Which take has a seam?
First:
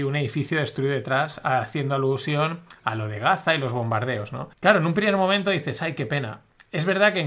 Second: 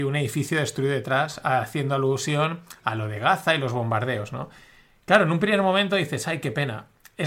first; 1 cut; at 4.5 s

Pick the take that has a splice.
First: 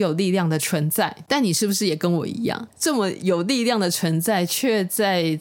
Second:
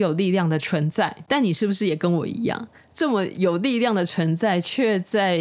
first; 1 cut; at 2.7 s

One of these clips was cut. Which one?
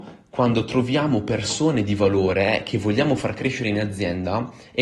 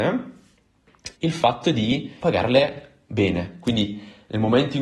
second; 2 cuts; at 1.1 s, 2.2 s

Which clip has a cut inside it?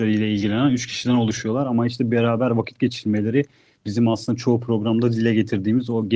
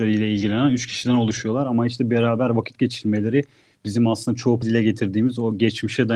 second; 1 cut; at 4.6 s

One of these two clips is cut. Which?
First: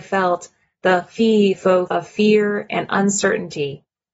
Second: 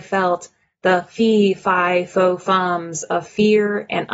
first; 2 cuts; at 1.5 s, 1.9 s

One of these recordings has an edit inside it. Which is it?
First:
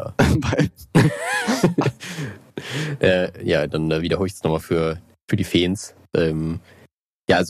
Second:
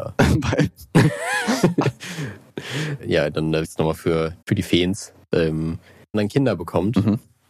second; 4 cuts; at 3.0 s, 3.6 s, 4.4 s, 6.1 s

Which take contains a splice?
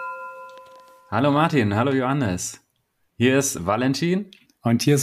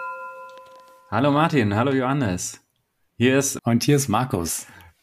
second; 1 cut; at 3.6 s

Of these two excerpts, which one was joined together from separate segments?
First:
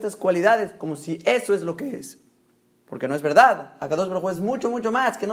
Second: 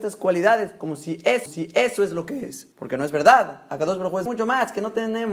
second; 3 cuts; at 1.5 s, 2.7 s, 4.3 s

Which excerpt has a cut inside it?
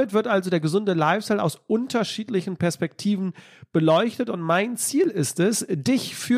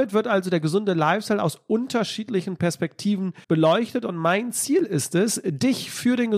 second; 1 cut; at 3.4 s

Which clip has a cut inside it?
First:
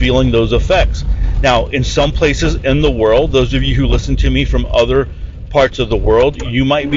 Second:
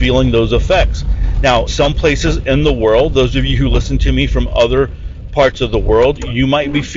second; 1 cut; at 1.7 s

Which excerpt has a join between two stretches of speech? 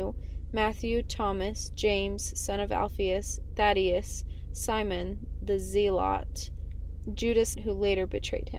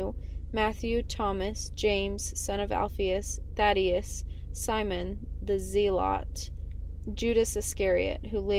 first; 1 cut; at 7.5 s

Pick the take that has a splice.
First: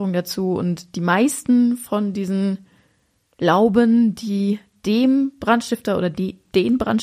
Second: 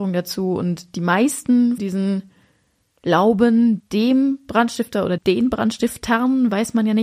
second; 3 cuts; at 1.8 s, 3.8 s, 5.2 s

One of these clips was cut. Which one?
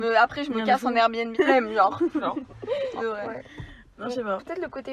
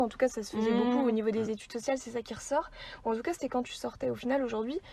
first; 3 cuts; at 1.3 s, 2.2 s, 3.0 s

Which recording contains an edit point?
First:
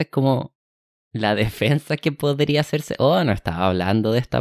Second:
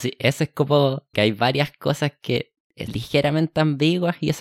second; 2 cuts; at 1.1 s, 2.9 s

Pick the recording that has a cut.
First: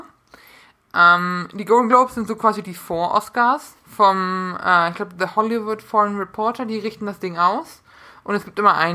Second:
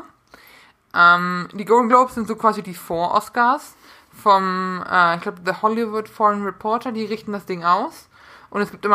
first; 1 cut; at 3.8 s

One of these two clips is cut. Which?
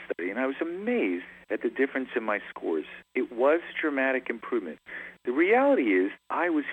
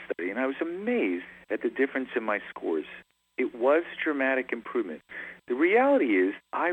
first; 1 cut; at 3.1 s

